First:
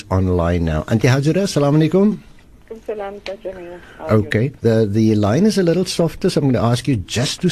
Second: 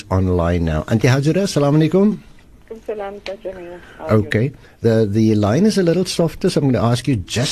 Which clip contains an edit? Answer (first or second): first